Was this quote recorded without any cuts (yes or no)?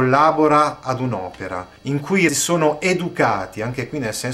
no